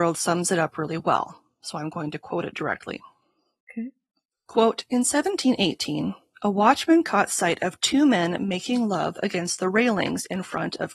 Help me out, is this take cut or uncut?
uncut